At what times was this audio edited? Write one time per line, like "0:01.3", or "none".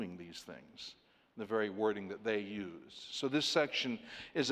none